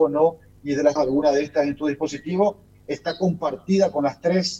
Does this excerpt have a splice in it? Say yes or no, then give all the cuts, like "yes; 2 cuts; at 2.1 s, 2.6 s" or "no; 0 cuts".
yes; 1 cut; at 1.0 s